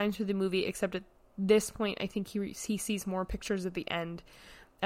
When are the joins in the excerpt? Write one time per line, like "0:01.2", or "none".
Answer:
none